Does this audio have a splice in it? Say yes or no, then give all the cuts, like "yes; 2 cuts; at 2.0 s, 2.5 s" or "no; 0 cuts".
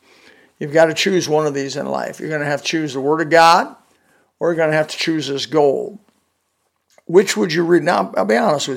no; 0 cuts